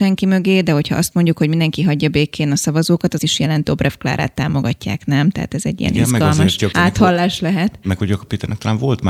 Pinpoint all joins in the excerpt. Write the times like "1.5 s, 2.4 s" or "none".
3.2 s, 3.6 s, 6.7 s